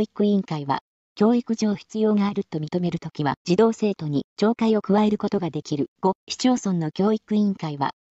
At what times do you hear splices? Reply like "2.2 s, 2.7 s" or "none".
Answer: 3.4 s, 5.9 s